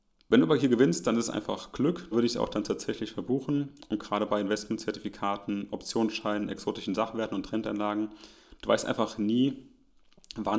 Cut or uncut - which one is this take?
cut